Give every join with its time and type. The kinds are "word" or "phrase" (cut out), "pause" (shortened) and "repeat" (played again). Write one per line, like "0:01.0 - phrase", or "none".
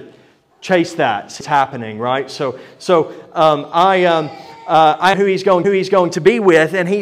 0:01.4 - word
0:05.1 - phrase
0:05.6 - repeat